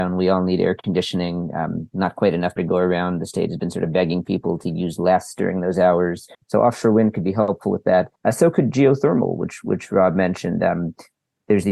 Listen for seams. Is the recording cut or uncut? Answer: cut